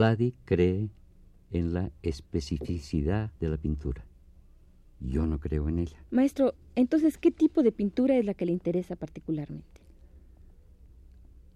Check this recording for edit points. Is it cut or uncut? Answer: cut